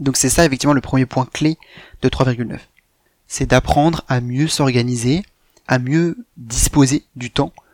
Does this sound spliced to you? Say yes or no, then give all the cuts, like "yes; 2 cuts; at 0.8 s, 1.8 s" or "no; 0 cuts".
yes; 1 cut; at 5.7 s